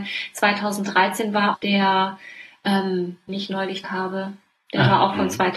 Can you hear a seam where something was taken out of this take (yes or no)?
yes